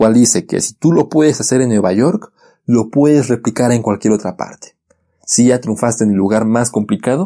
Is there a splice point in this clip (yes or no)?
no